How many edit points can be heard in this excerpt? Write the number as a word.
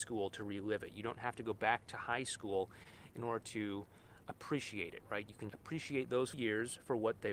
two